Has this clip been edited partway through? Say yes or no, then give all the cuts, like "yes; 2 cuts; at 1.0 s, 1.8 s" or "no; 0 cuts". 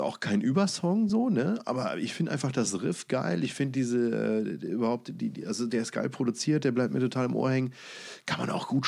no; 0 cuts